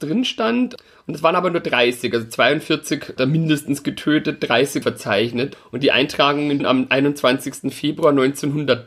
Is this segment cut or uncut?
cut